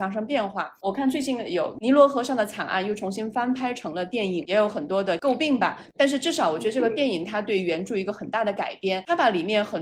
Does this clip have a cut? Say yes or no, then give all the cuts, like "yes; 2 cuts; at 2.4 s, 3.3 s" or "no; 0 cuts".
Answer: yes; 1 cut; at 4.4 s